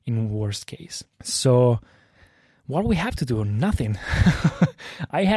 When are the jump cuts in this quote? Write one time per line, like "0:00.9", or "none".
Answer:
0:01.1